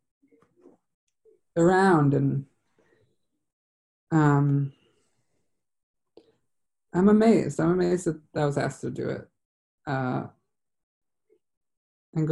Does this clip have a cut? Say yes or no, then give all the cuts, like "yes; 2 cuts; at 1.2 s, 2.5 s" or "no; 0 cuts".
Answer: no; 0 cuts